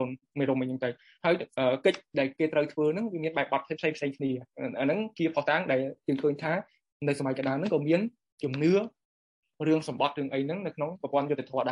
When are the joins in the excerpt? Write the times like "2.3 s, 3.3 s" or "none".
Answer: none

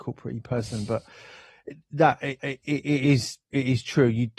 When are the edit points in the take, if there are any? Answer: 2.4 s

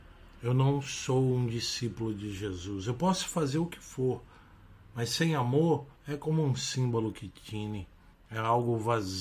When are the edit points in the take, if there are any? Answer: 6.0 s, 8.1 s

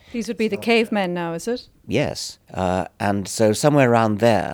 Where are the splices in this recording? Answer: 2.4 s

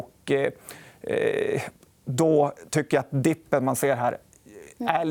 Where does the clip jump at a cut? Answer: none

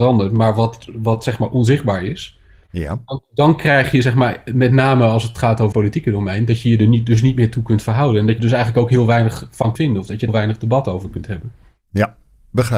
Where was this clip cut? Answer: 5.7 s, 8.4 s, 9.8 s, 10.3 s

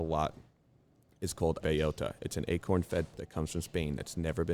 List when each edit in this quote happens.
1.6 s, 3.1 s

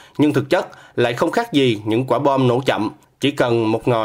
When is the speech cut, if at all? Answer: none

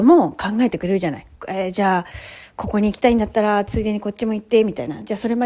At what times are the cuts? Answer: 1.4 s

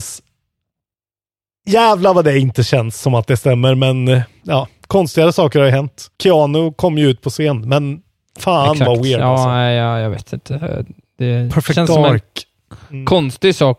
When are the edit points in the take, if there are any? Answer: 6.1 s

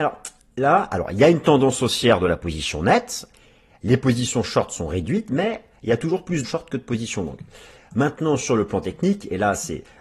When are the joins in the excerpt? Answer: 6.4 s

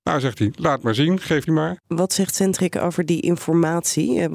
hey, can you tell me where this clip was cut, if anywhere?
1.5 s, 1.8 s

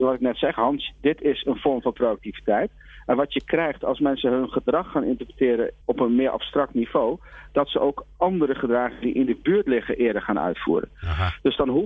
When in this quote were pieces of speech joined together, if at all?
5.8 s

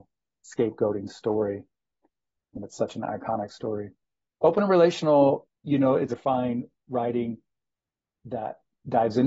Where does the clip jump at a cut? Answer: 5.6 s, 6.1 s

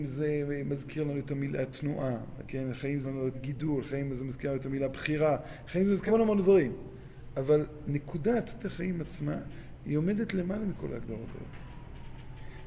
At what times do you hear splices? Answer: 3.0 s, 3.3 s, 6.1 s, 8.6 s

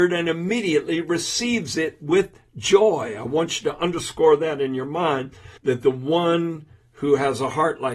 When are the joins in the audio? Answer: 5.6 s

